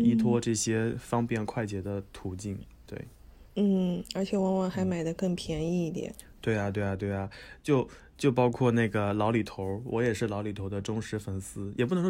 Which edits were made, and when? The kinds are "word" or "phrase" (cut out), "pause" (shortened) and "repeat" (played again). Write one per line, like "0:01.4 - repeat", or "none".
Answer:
none